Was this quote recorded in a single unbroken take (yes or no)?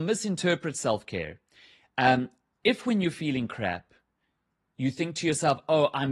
yes